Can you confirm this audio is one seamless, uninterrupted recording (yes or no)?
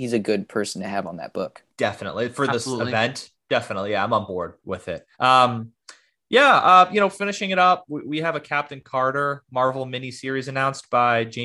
no